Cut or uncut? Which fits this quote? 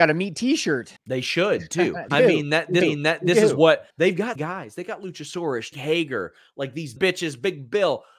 cut